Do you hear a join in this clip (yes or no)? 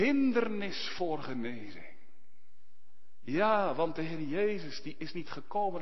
no